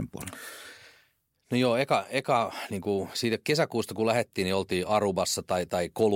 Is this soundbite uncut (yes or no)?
yes